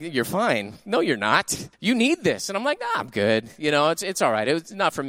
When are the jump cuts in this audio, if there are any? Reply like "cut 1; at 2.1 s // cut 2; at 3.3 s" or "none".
cut 1; at 1.7 s